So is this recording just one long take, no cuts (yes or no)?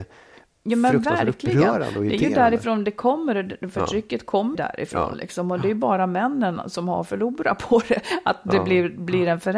no